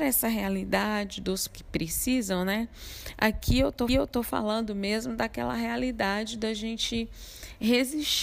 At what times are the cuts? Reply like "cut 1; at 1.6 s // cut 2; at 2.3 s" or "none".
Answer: cut 1; at 1.5 s // cut 2; at 3.9 s

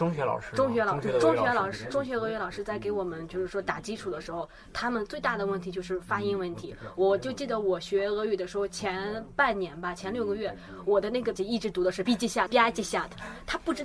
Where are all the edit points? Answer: cut 1; at 11.4 s // cut 2; at 12.1 s // cut 3; at 12.5 s

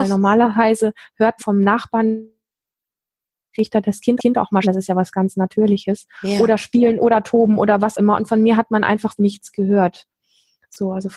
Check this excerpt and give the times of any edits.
cut 1; at 1.4 s // cut 2; at 4.2 s // cut 3; at 4.6 s // cut 4; at 6.1 s // cut 5; at 7.9 s // cut 6; at 9.2 s

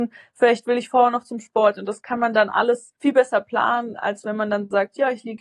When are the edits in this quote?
cut 1; at 3.0 s

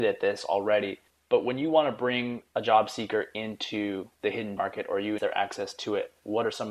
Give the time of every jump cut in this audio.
cut 1; at 1.1 s // cut 2; at 2.5 s // cut 3; at 4.1 s // cut 4; at 4.6 s // cut 5; at 5.2 s

